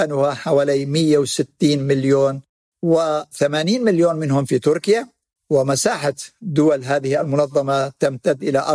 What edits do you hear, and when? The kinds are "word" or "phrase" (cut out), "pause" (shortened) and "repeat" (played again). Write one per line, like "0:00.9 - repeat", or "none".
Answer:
none